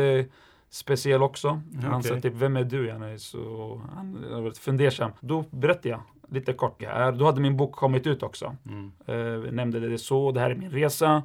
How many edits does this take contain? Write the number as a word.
two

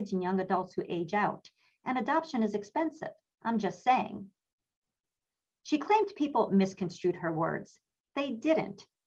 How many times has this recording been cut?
zero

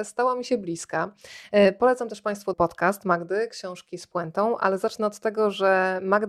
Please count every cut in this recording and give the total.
one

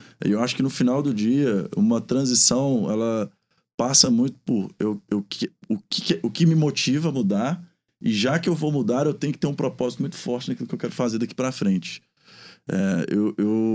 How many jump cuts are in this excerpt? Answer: zero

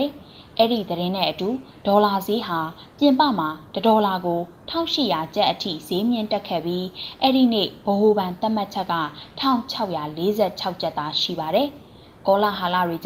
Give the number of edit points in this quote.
zero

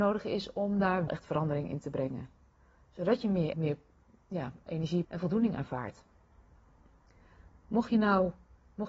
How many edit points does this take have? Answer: three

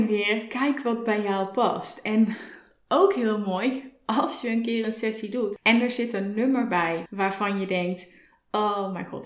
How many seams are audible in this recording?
zero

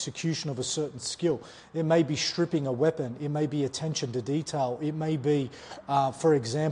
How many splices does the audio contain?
zero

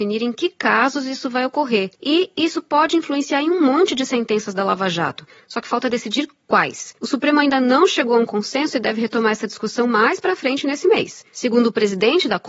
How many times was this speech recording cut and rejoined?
three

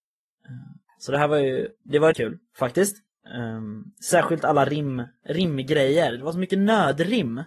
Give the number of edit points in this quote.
one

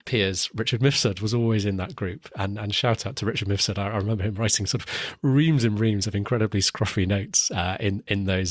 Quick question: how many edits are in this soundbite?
zero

